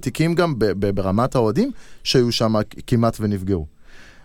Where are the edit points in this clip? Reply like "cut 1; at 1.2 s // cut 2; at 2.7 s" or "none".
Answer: none

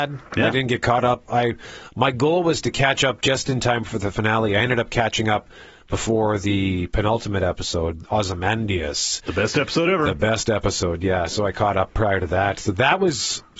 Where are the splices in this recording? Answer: none

